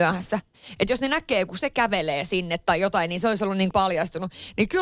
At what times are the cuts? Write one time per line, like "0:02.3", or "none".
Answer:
0:03.7